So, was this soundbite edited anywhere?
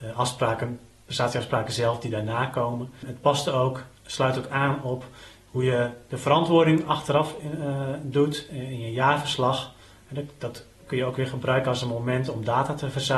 no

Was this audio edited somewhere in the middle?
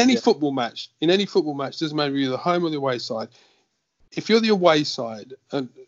no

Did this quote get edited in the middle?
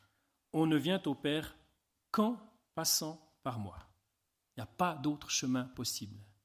no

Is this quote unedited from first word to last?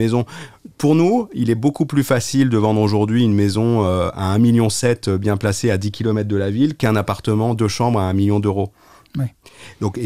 yes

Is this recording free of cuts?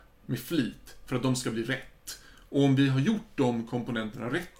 yes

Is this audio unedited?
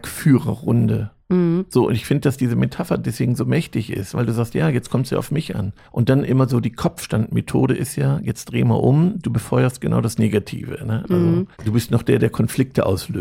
no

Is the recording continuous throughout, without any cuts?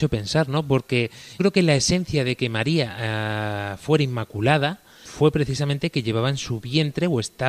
no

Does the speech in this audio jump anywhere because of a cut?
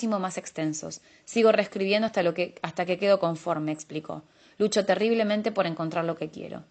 no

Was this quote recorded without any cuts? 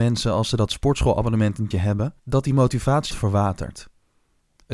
no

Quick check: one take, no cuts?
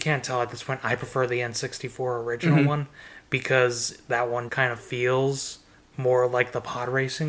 no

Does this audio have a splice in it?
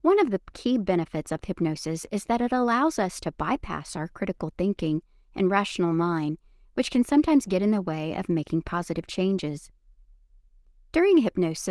no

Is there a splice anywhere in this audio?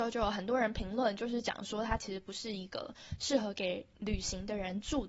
no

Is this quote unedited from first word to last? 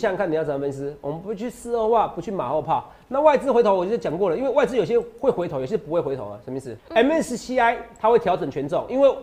no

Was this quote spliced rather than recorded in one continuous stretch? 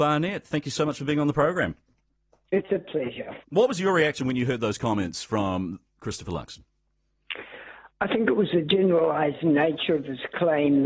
yes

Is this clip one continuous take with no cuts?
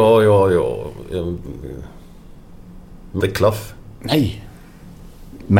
no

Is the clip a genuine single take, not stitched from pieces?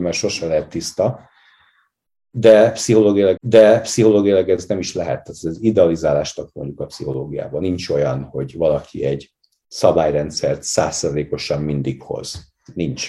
no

